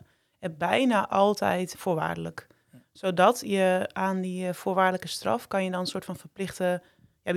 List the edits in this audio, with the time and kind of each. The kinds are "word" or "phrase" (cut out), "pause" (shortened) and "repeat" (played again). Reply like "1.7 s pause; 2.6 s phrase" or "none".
1.7 s word

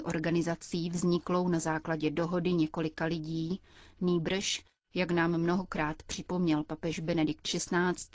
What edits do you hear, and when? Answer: none

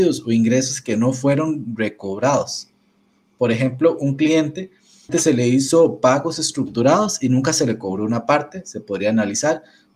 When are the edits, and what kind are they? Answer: none

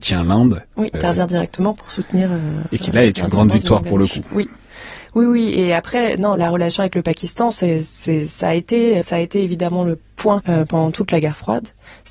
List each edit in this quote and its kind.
0.9 s phrase; 6.4 s word; 9.0 s word; 10.4 s word

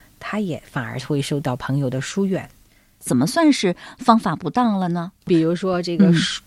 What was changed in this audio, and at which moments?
5.2 s pause

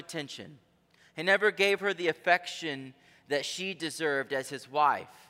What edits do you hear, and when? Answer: none

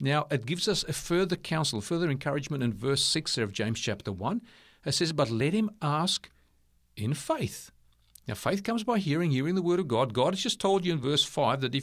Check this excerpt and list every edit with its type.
none

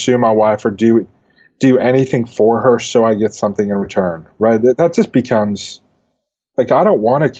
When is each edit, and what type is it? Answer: none

